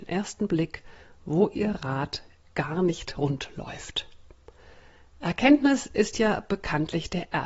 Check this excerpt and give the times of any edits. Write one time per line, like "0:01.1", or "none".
none